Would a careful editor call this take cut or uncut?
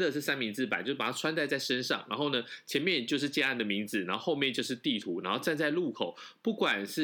uncut